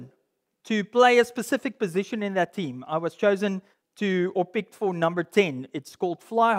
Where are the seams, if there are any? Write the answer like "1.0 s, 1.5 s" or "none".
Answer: 3.7 s